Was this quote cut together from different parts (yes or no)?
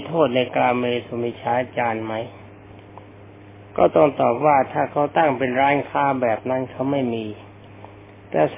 no